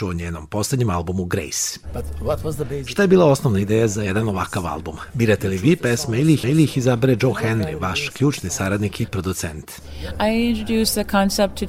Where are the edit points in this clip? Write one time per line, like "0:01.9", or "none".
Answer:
0:06.4